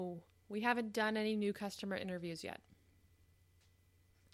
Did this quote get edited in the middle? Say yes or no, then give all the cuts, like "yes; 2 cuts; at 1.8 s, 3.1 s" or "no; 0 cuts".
no; 0 cuts